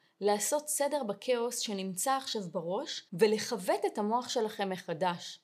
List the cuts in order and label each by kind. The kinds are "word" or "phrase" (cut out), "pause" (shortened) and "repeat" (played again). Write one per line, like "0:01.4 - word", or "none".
0:03.1 - pause